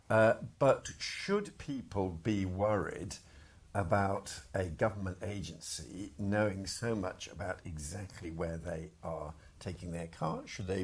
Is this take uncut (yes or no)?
yes